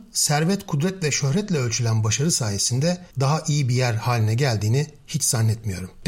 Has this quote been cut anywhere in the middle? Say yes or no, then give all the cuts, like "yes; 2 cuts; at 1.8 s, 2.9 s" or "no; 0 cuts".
yes; 1 cut; at 3.1 s